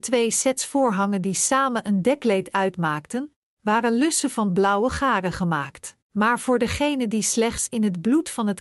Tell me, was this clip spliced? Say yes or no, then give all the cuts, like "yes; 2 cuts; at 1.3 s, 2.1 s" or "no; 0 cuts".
yes; 1 cut; at 6.0 s